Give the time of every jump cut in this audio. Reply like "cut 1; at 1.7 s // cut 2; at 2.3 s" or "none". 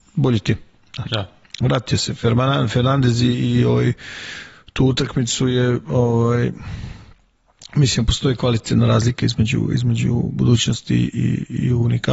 none